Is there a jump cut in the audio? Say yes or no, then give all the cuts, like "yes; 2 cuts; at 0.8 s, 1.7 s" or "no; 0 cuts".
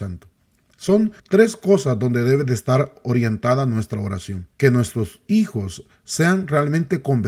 yes; 2 cuts; at 1.2 s, 4.5 s